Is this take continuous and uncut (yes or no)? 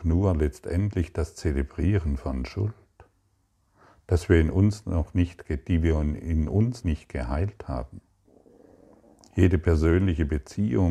no